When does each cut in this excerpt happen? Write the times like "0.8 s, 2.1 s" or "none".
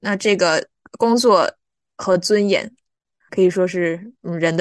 3.3 s